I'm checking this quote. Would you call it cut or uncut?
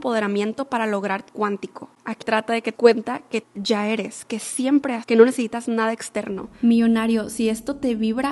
cut